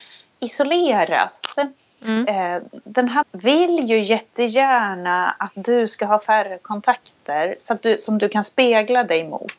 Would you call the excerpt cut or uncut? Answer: cut